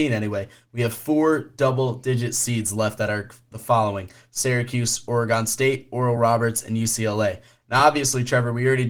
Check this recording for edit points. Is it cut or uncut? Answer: uncut